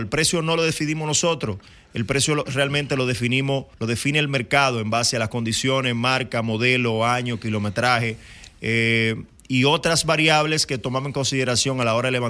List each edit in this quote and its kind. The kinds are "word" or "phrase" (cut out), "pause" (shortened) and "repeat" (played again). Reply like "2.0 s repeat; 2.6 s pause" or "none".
3.7 s pause